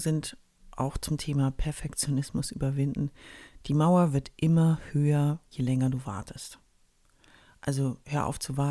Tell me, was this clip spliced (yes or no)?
no